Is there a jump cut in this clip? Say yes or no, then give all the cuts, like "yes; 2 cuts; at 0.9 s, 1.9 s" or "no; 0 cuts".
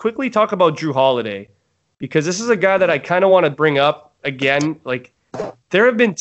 no; 0 cuts